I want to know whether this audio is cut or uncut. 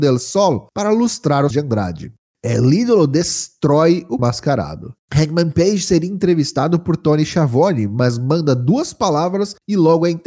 cut